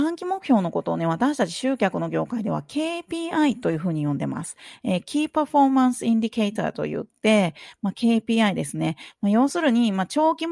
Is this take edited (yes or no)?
no